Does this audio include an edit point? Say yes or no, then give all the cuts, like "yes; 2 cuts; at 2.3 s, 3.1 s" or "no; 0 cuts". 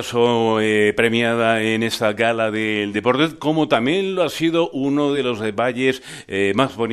no; 0 cuts